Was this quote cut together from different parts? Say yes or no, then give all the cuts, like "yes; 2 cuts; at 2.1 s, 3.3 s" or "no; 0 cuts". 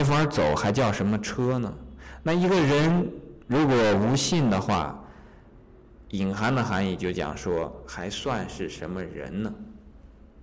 yes; 1 cut; at 3.4 s